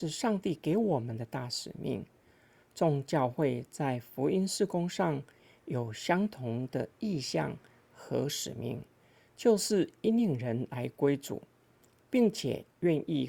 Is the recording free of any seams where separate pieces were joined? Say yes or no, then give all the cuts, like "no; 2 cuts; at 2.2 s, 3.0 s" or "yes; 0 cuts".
yes; 0 cuts